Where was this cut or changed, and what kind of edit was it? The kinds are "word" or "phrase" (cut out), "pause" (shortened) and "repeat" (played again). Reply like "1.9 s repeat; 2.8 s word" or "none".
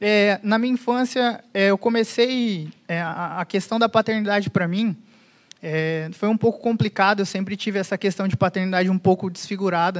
none